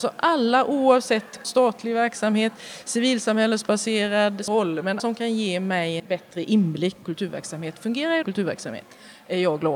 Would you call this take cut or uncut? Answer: cut